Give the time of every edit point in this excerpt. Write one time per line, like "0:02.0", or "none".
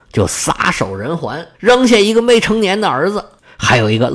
0:01.5